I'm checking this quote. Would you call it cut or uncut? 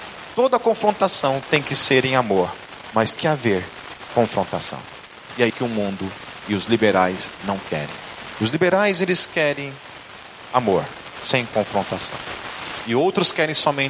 cut